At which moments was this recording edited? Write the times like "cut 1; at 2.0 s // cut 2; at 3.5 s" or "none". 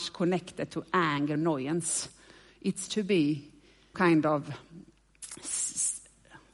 cut 1; at 1.4 s // cut 2; at 2.9 s // cut 3; at 3.9 s

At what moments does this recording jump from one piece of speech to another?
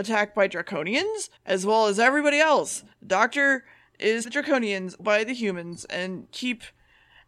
cut 1; at 1.4 s // cut 2; at 2.9 s // cut 3; at 4.2 s // cut 4; at 5.0 s // cut 5; at 6.3 s

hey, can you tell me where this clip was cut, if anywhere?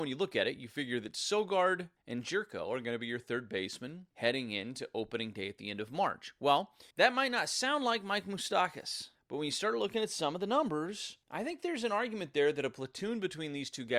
cut 1; at 2.0 s // cut 2; at 4.1 s // cut 3; at 6.9 s // cut 4; at 9.2 s // cut 5; at 11.2 s

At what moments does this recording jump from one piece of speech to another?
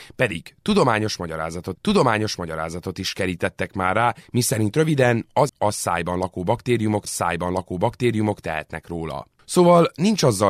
cut 1; at 1.7 s // cut 2; at 5.5 s // cut 3; at 7.1 s

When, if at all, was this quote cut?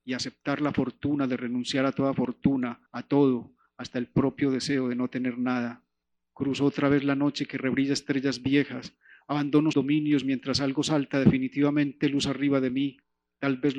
cut 1; at 2.9 s // cut 2; at 6.0 s // cut 3; at 9.7 s

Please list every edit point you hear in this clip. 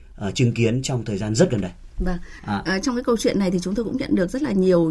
none

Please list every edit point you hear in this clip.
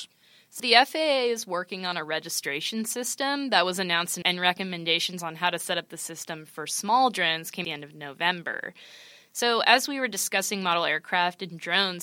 cut 1; at 4.2 s // cut 2; at 7.6 s

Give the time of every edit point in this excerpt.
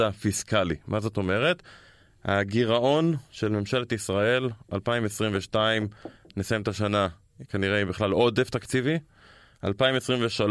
none

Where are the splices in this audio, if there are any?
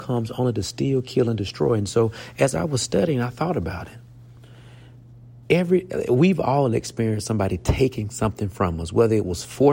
cut 1; at 5.4 s

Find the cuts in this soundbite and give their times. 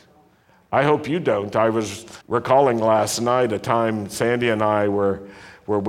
cut 1; at 2.2 s

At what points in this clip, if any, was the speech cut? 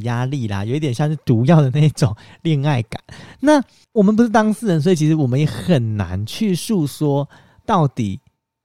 cut 1; at 3.8 s

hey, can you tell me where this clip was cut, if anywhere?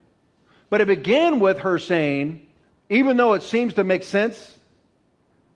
cut 1; at 2.7 s

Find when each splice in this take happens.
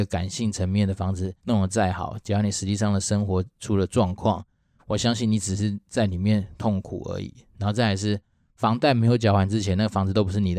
cut 1; at 1.4 s

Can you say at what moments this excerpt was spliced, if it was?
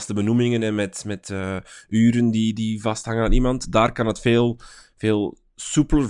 none

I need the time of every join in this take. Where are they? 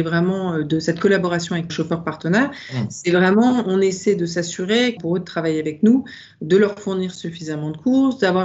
cut 1; at 1.7 s // cut 2; at 5.0 s

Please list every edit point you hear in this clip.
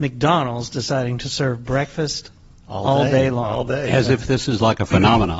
none

